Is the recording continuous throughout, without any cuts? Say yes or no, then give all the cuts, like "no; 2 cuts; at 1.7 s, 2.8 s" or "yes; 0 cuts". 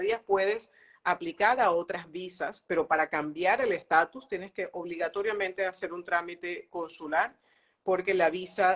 yes; 0 cuts